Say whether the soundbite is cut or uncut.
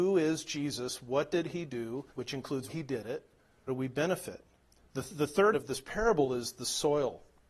cut